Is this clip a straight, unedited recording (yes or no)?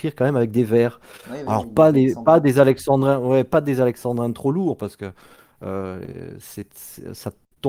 yes